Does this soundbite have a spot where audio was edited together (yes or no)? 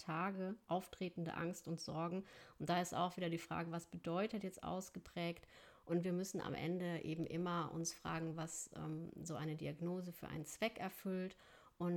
no